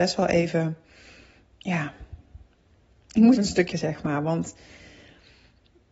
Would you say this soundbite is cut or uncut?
cut